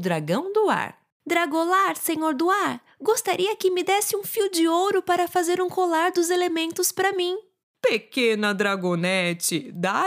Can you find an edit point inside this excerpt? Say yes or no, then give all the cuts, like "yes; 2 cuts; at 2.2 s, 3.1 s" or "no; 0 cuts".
yes; 2 cuts; at 1.1 s, 7.6 s